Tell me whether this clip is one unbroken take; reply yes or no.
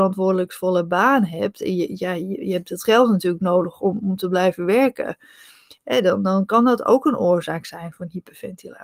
yes